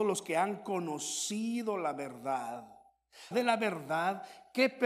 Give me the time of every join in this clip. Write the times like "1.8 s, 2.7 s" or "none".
3.3 s